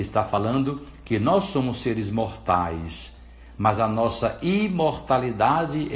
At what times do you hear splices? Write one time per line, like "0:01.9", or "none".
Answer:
none